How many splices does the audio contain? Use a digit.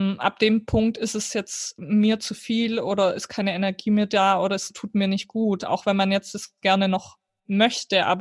1